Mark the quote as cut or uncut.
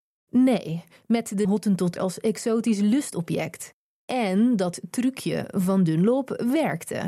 cut